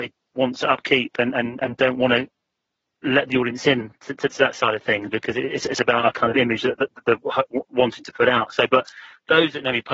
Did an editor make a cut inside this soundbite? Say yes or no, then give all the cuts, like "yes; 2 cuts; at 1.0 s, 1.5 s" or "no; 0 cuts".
no; 0 cuts